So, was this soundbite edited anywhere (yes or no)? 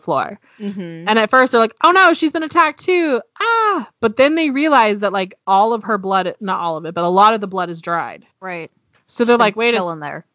yes